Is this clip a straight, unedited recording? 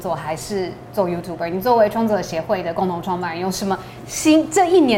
yes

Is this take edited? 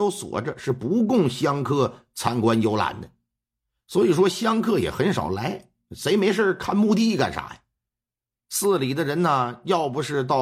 no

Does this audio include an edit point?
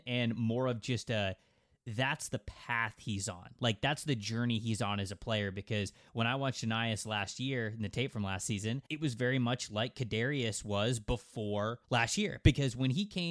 yes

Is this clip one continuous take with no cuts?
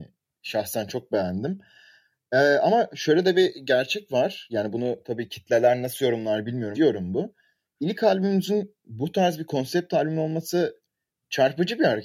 no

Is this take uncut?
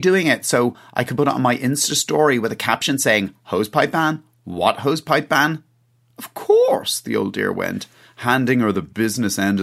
yes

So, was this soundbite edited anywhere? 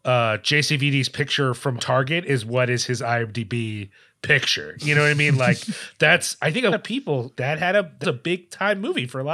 yes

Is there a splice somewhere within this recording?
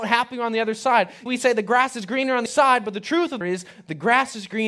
yes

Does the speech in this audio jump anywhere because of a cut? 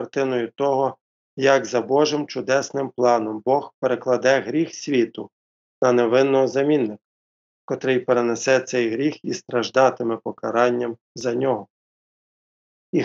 no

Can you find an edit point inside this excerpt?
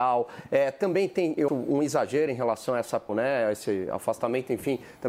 yes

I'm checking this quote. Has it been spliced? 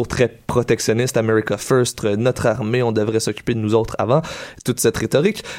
no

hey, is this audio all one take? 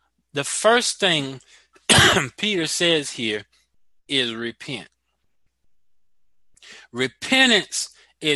yes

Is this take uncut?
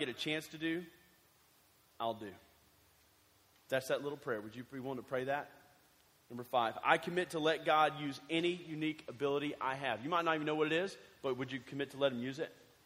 yes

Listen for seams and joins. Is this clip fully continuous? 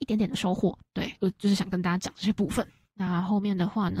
yes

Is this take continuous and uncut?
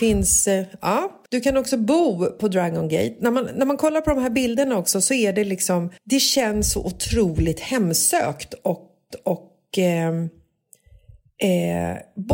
no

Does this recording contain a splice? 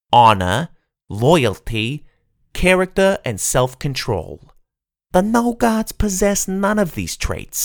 no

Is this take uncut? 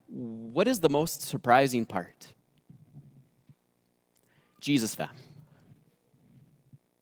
no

